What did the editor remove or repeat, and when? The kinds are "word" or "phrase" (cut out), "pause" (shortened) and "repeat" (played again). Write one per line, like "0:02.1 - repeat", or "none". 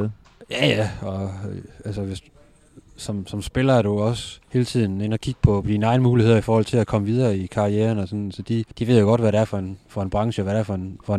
0:04.4 - pause
0:08.7 - pause